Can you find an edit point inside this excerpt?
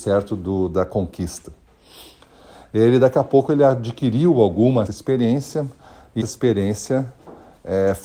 yes; 2 cuts; at 4.9 s, 6.2 s

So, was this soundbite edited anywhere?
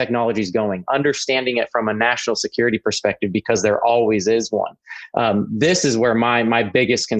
no; 0 cuts

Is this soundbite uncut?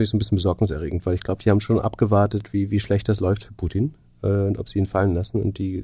yes; 0 cuts

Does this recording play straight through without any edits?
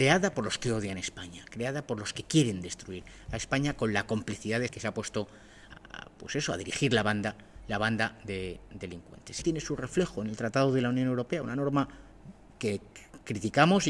no; 4 cuts; at 4.7 s, 5.7 s, 9.4 s, 12.5 s

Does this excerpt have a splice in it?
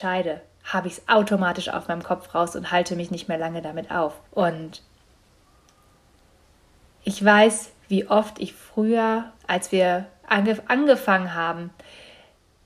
yes; 2 cuts; at 4.3 s, 9.4 s

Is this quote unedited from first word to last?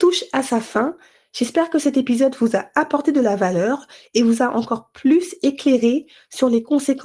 yes; 0 cuts

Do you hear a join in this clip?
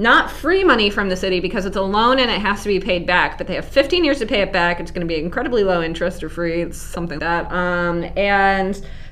yes; 1 cut; at 7.2 s

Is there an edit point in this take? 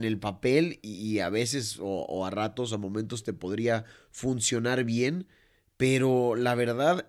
no; 0 cuts

